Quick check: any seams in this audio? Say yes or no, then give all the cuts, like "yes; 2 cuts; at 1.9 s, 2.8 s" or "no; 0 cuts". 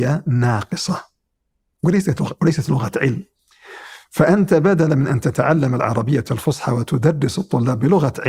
no; 0 cuts